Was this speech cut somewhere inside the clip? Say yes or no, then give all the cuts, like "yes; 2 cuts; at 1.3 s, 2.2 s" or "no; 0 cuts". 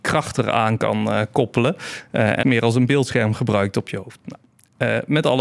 yes; 1 cut; at 2.4 s